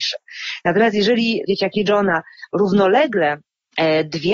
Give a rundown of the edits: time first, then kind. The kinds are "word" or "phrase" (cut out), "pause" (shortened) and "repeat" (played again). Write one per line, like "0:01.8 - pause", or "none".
0:01.5 - phrase
0:02.5 - word